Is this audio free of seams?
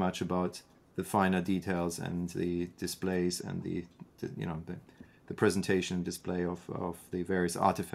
yes; 0 cuts

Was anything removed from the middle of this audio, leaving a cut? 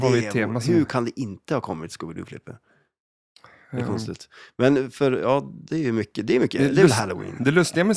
no; 0 cuts

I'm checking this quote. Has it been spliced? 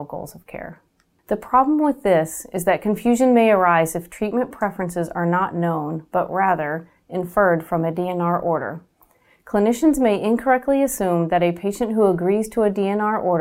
no; 0 cuts

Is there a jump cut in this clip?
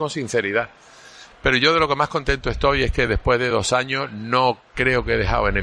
no; 0 cuts

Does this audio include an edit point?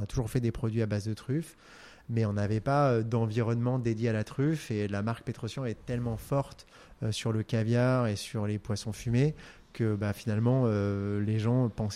no; 0 cuts

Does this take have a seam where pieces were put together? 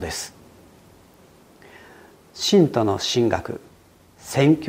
no; 0 cuts

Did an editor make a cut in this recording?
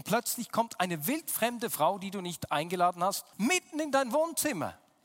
yes; 1 cut; at 3.3 s

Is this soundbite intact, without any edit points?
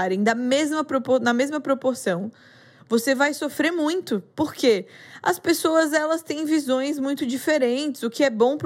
yes; 0 cuts

